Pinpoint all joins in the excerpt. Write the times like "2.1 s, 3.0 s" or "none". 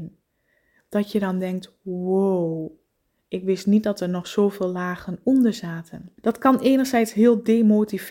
6.2 s